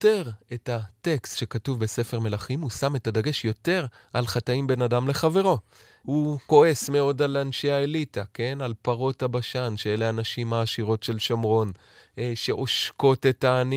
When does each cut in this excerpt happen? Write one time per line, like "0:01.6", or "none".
none